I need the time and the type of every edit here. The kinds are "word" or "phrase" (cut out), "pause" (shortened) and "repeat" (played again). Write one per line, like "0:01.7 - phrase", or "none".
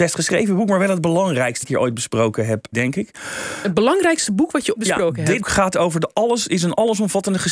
0:01.6 - phrase
0:02.7 - word
0:04.8 - word
0:05.4 - word